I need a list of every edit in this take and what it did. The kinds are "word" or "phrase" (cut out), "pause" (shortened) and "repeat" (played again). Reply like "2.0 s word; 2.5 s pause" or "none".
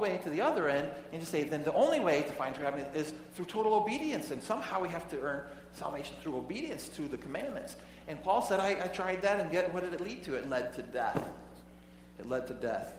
none